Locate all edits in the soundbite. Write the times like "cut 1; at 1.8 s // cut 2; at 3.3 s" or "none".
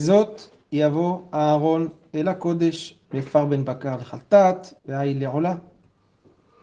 cut 1; at 3.0 s // cut 2; at 4.8 s